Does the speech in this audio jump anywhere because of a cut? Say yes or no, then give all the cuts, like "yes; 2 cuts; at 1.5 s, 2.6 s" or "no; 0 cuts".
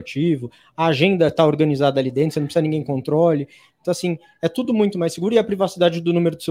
no; 0 cuts